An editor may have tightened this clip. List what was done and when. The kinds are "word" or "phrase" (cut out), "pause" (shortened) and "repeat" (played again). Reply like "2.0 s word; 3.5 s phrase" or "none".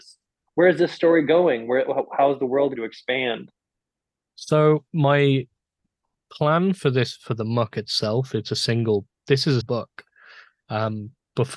2.8 s word; 4.9 s pause; 9.6 s word